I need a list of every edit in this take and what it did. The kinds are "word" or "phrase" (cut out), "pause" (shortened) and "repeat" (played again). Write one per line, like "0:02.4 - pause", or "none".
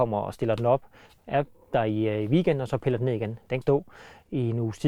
0:03.6 - phrase